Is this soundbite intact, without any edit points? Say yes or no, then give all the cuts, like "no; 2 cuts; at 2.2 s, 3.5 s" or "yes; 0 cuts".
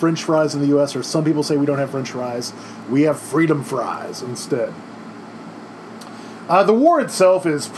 yes; 0 cuts